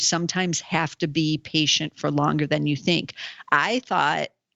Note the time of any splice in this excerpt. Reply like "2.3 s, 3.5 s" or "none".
none